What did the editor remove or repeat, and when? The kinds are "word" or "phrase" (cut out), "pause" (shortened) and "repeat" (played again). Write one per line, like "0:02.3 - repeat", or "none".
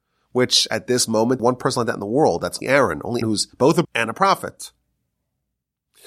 0:01.4 - phrase
0:02.6 - word
0:03.2 - word
0:03.5 - pause
0:03.8 - word